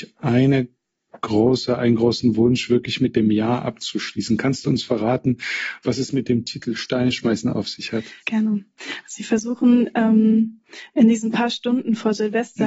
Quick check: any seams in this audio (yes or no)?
yes